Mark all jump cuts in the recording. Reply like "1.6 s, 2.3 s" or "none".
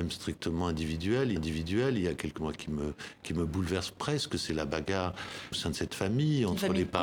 1.4 s, 2.4 s, 5.5 s